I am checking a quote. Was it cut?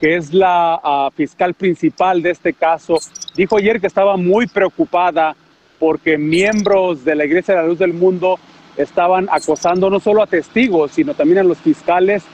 no; 0 cuts

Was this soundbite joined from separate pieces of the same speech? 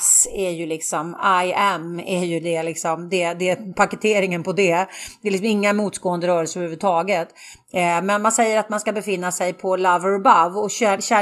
no; 0 cuts

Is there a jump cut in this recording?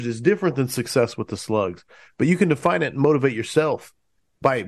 no; 0 cuts

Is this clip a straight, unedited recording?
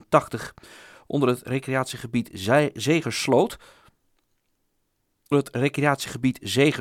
no; 1 cut; at 5.3 s

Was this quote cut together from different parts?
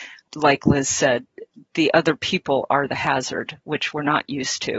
no; 0 cuts

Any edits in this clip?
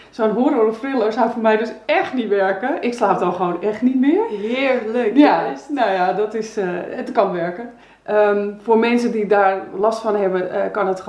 no; 0 cuts

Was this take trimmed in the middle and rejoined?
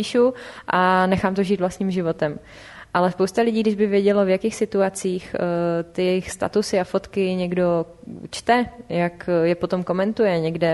no; 0 cuts

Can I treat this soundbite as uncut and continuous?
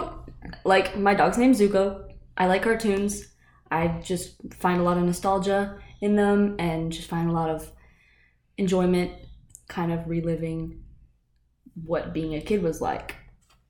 yes; 0 cuts

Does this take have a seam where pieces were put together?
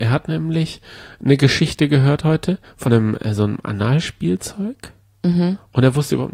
yes; 1 cut; at 2.9 s

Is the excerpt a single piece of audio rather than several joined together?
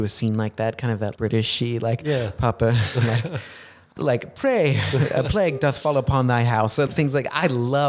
no; 3 cuts; at 1.2 s, 4.0 s, 6.9 s

